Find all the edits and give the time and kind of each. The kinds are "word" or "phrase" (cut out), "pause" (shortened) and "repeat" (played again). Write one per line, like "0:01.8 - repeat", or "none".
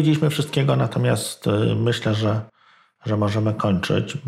none